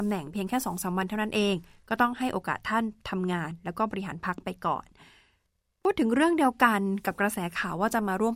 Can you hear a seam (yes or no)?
no